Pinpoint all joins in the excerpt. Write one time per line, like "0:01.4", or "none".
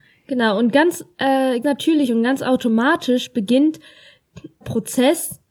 0:01.6
0:04.6